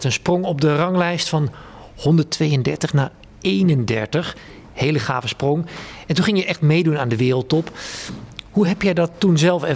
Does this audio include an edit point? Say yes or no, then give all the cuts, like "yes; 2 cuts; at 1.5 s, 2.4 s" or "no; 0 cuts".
no; 0 cuts